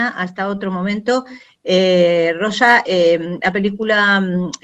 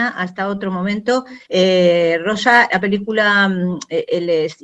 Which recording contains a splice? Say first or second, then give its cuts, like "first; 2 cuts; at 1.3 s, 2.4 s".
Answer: second; 2 cuts; at 1.5 s, 2.7 s